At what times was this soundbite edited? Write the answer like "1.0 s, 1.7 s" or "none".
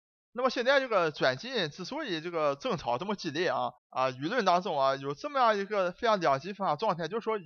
3.8 s